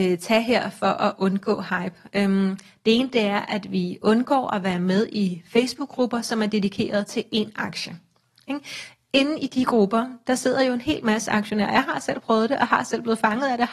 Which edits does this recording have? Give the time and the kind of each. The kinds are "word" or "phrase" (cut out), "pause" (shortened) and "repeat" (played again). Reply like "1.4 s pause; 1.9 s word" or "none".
none